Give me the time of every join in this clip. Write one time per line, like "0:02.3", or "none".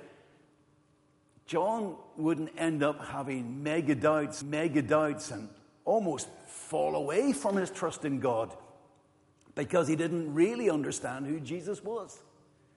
0:04.4